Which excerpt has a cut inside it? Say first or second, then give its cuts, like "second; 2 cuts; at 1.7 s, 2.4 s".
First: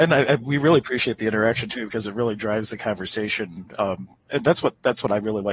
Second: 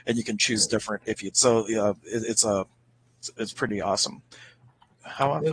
second; 1 cut; at 1.3 s